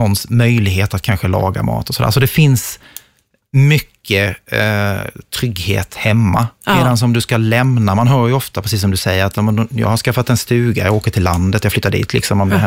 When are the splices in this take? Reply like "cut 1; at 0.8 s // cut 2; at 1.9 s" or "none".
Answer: none